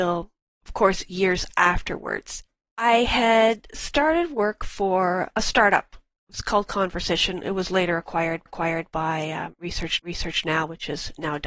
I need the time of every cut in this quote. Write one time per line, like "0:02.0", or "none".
0:08.5
0:10.0